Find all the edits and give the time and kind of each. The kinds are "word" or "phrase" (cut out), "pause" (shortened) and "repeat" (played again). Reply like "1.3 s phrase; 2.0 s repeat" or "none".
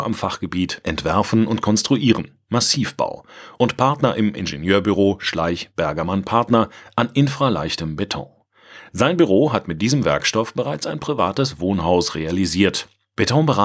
none